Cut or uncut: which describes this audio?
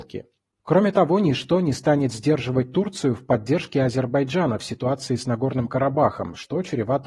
uncut